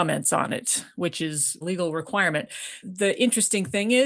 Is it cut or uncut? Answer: cut